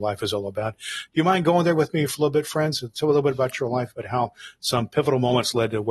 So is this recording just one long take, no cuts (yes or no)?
yes